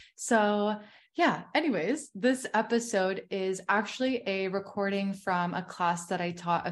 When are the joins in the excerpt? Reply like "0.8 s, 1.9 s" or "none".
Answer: none